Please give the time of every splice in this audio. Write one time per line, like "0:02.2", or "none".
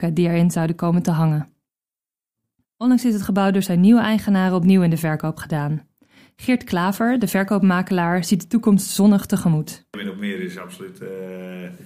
0:09.9